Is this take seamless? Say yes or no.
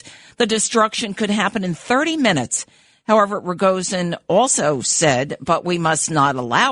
yes